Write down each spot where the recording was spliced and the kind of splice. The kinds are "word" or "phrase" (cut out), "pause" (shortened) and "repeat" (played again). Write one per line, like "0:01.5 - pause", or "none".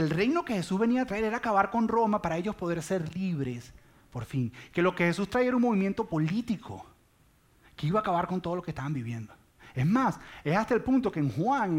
none

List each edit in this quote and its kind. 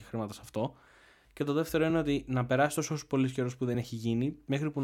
none

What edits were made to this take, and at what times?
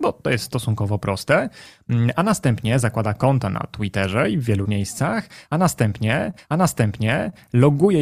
0:04.7 - word
0:06.4 - repeat

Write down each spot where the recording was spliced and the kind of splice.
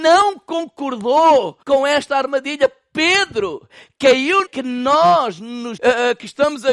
0:01.6 - pause
0:04.4 - phrase
0:05.8 - word

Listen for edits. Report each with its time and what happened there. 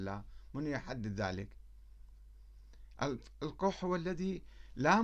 none

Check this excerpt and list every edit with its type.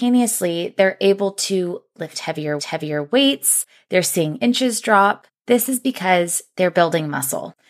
0:02.6 - repeat

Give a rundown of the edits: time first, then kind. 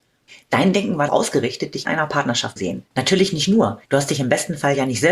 0:01.1 - word
0:01.8 - phrase
0:02.6 - word
0:03.8 - pause

